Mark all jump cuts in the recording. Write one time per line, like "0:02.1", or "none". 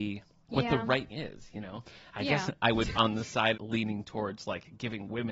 0:01.1
0:02.5
0:03.0
0:03.5